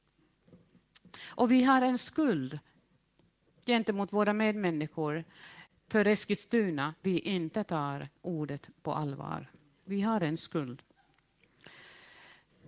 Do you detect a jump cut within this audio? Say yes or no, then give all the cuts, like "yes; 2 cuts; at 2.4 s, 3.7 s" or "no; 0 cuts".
yes; 1 cut; at 7.0 s